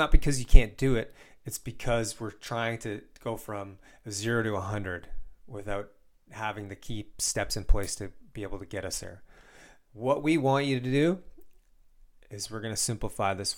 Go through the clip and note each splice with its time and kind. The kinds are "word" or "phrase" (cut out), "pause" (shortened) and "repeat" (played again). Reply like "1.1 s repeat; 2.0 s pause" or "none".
none